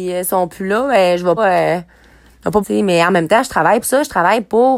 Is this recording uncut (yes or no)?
no